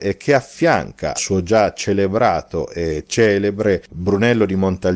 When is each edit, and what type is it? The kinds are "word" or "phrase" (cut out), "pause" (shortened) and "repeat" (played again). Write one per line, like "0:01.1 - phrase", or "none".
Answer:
0:01.2 - word